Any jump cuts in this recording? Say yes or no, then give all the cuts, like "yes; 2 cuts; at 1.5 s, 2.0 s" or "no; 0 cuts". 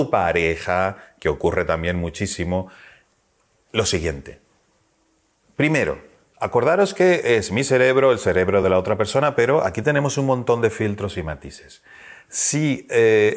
no; 0 cuts